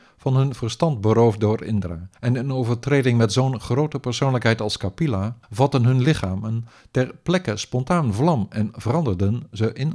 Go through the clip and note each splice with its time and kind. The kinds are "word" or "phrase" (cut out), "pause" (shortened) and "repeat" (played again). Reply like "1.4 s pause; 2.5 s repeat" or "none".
2.2 s pause; 5.4 s pause